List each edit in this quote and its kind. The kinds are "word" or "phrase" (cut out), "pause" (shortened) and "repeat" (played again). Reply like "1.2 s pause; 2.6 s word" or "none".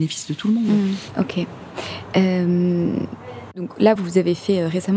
none